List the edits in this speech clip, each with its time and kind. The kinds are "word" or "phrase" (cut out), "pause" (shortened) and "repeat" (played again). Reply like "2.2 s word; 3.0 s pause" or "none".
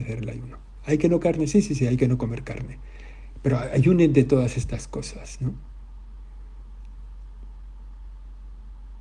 1.2 s word